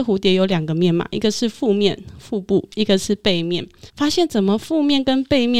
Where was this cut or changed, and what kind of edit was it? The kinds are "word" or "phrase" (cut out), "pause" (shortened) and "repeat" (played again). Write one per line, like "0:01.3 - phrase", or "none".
0:03.9 - pause